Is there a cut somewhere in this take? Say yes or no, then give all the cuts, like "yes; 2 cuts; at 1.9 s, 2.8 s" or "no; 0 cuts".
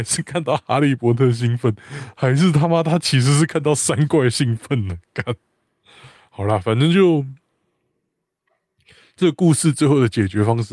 no; 0 cuts